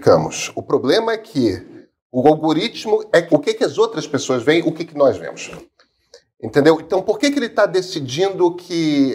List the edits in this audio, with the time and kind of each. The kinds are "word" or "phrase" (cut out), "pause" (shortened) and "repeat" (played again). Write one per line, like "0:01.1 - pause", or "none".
0:03.3 - word